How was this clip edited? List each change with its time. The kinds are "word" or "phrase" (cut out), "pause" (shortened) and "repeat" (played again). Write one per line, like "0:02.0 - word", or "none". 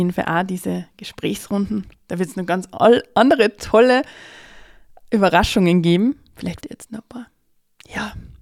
0:06.6 - word